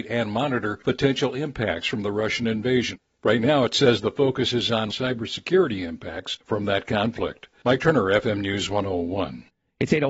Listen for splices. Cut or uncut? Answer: uncut